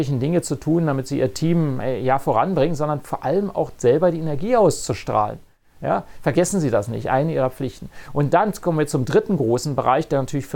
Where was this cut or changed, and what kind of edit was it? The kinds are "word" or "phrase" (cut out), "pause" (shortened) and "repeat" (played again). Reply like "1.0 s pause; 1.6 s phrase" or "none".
none